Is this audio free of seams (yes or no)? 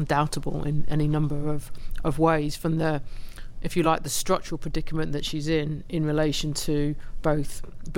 yes